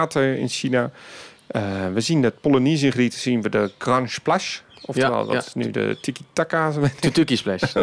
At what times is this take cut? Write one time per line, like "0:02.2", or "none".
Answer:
none